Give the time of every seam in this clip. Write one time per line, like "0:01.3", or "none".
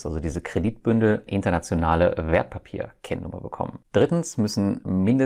0:01.3
0:03.8